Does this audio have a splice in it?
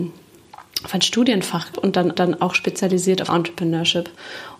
yes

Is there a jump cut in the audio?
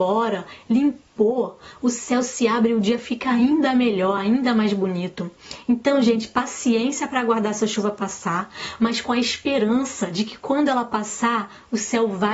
no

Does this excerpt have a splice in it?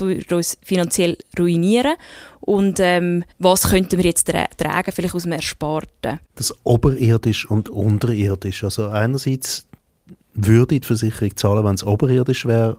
yes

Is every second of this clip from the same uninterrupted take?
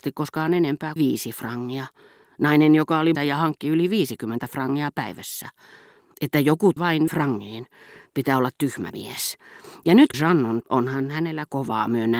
no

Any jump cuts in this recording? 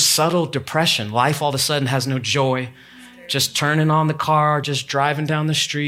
no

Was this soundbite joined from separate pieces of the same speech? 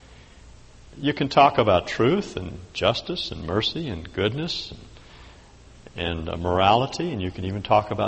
no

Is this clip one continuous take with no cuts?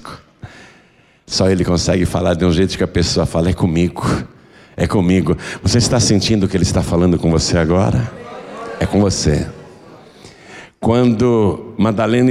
yes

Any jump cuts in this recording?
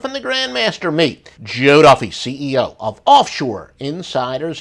yes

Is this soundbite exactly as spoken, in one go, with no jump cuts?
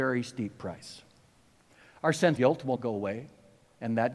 no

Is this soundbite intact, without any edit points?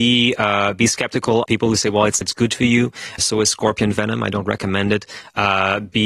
no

